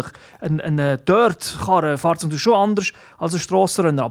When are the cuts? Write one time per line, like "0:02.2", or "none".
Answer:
none